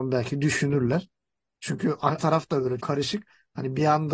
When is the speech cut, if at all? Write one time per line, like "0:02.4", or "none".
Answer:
0:02.2
0:02.8